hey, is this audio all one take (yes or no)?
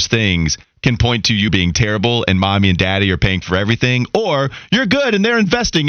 no